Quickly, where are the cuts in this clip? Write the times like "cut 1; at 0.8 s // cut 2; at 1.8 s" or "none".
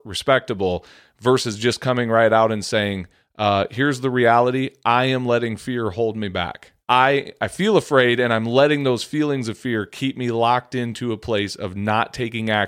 cut 1; at 6.8 s